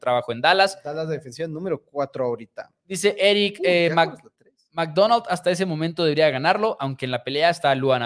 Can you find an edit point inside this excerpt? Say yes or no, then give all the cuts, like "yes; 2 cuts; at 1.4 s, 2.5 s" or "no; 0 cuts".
no; 0 cuts